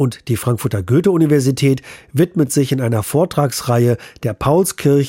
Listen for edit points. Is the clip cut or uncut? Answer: uncut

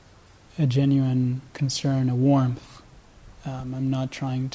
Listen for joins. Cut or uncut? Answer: cut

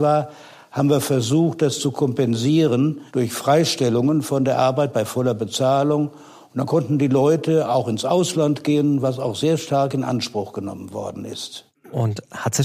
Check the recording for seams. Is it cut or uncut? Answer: cut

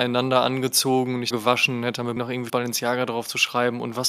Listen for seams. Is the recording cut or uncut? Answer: cut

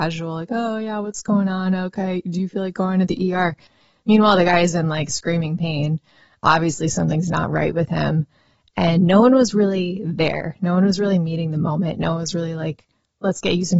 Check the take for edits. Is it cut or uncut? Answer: uncut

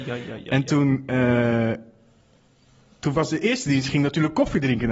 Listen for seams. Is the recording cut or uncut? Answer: uncut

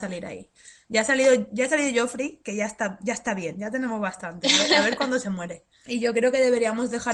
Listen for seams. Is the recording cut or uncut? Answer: uncut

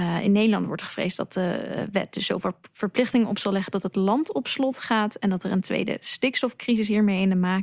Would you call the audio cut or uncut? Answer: uncut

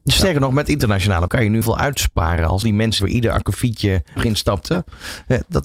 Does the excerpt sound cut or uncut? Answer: cut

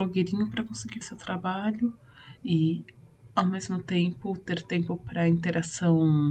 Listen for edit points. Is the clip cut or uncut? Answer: cut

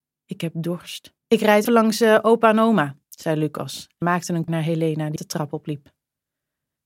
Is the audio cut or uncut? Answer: cut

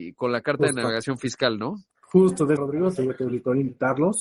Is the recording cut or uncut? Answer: cut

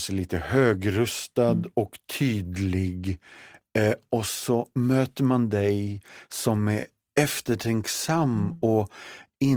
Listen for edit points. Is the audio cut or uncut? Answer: uncut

